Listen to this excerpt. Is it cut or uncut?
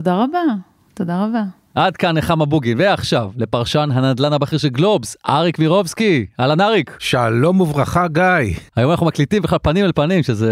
uncut